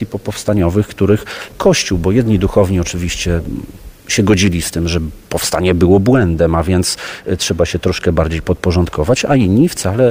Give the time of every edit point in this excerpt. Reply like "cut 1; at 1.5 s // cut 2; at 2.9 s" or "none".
cut 1; at 1.5 s